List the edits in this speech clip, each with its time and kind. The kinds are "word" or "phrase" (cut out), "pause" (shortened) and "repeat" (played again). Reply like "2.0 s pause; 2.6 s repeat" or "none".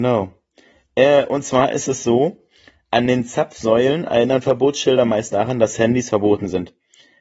none